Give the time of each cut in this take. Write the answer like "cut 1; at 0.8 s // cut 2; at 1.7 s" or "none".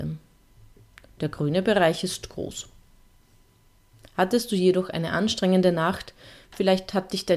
none